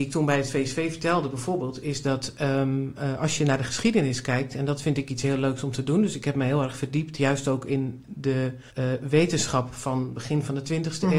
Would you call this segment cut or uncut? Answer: cut